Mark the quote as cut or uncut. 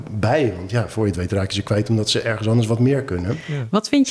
uncut